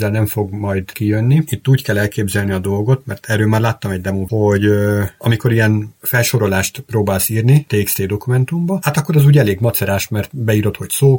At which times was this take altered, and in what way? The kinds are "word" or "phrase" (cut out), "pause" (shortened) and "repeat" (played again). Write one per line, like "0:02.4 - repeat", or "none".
0:04.3 - word

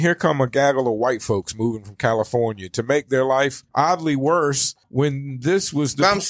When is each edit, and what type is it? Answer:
0:03.7 - pause
0:04.8 - pause

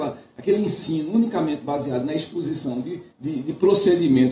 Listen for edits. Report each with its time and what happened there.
0:03.1 - pause

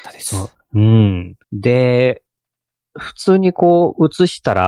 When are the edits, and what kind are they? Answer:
0:01.4 - pause

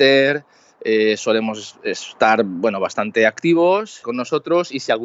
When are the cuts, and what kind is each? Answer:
0:04.0 - word

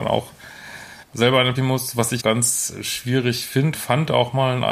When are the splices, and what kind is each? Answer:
0:01.0 - pause
0:01.5 - word
0:02.2 - word
0:03.7 - word

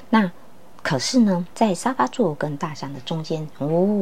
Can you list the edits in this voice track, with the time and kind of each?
0:01.5 - word

